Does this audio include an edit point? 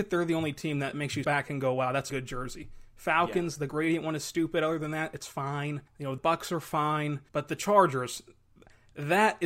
yes; 6 cuts; at 0.9 s, 1.2 s, 2.1 s, 5.9 s, 6.2 s, 7.3 s

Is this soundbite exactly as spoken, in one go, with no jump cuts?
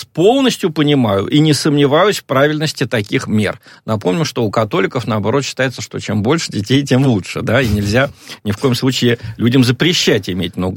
yes; 0 cuts

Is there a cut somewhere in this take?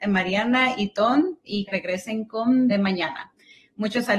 yes; 2 cuts; at 1.7 s, 2.7 s

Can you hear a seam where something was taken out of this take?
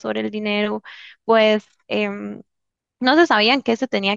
no; 0 cuts

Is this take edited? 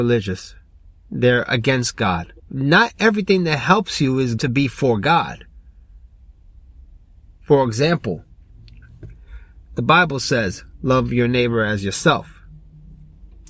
yes; 2 cuts; at 2.4 s, 4.4 s

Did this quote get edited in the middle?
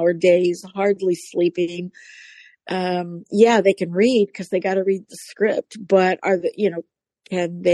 no; 0 cuts

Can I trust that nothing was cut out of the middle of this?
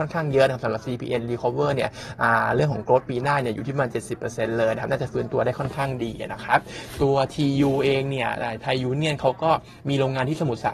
yes; 0 cuts

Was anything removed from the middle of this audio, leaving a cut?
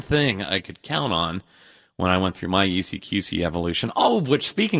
no; 0 cuts

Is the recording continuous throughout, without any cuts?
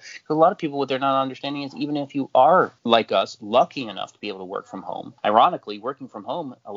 no; 2 cuts; at 2.8 s, 5.2 s

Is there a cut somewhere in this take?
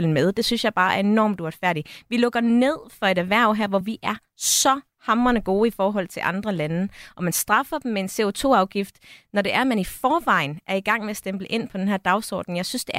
no; 0 cuts

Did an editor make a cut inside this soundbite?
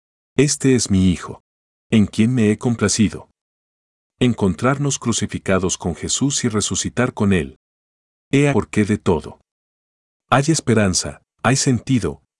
yes; 1 cut; at 8.5 s

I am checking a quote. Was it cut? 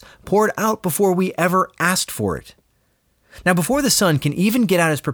no; 0 cuts

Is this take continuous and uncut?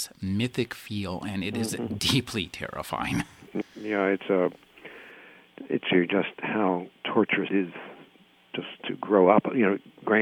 no; 5 cuts; at 2.0 s, 3.6 s, 5.9 s, 7.5 s, 8.8 s

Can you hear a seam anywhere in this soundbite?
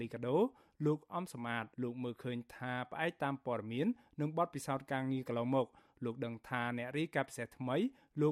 yes; 1 cut; at 1.7 s

